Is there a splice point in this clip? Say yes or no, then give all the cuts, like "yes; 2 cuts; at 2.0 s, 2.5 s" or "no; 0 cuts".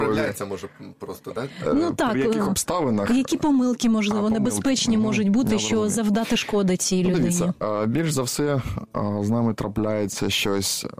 no; 0 cuts